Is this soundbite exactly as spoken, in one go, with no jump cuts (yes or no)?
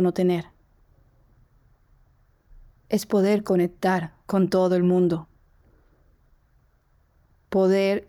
no